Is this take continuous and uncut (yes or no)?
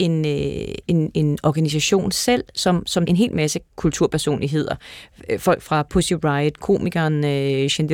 no